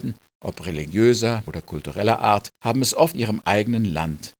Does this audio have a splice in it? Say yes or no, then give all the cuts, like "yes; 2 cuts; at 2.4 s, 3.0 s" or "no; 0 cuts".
yes; 3 cuts; at 1.5 s, 2.6 s, 3.1 s